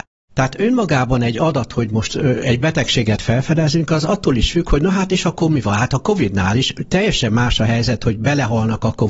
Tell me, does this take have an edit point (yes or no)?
no